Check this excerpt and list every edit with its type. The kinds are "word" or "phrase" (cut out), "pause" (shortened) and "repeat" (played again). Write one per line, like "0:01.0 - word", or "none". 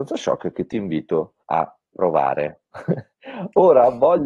0:01.4 - pause
0:03.1 - pause

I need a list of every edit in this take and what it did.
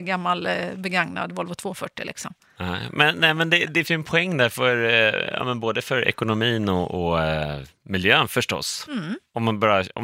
0:03.8 - word

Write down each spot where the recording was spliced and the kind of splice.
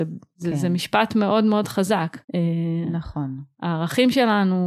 0:02.2 - pause

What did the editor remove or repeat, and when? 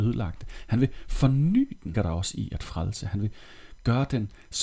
0:01.9 - word

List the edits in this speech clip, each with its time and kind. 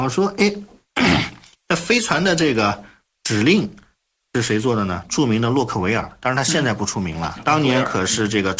none

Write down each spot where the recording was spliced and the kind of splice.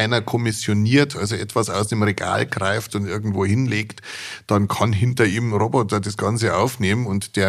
none

